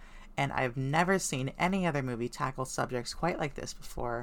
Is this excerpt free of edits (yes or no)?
yes